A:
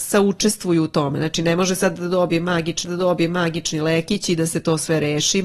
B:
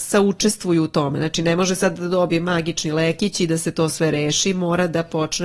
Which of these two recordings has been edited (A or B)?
A